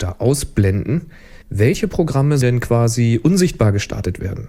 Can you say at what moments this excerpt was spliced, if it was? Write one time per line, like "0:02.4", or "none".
0:01.4
0:02.4